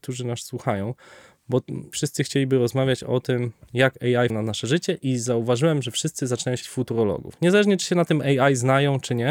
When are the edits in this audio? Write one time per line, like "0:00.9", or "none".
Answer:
0:01.9
0:04.3
0:06.6